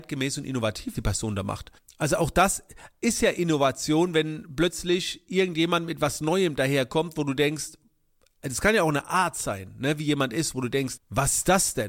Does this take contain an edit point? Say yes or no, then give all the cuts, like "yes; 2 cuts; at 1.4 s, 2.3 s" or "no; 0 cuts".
yes; 3 cuts; at 0.9 s, 1.8 s, 11.0 s